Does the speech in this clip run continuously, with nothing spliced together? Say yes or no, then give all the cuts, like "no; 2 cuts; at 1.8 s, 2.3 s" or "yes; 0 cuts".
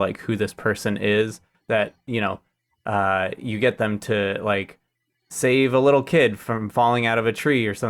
yes; 0 cuts